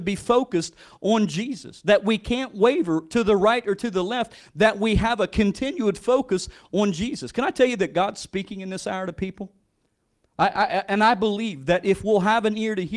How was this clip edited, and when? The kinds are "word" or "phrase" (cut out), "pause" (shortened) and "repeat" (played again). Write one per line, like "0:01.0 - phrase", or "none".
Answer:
none